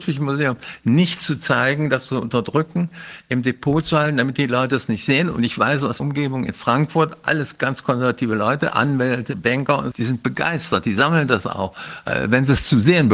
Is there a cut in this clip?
yes; 2 cuts; at 6.0 s, 9.9 s

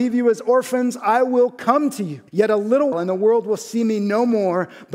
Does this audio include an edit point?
yes; 2 cuts; at 2.3 s, 2.9 s

